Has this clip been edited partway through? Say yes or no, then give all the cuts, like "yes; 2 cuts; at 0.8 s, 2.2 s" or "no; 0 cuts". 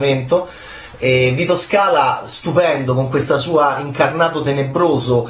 no; 0 cuts